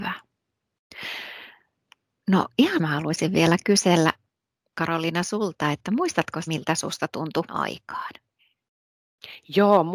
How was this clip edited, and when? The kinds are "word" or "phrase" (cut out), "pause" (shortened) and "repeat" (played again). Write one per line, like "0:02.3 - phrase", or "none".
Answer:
0:02.8 - word
0:06.5 - word
0:07.5 - word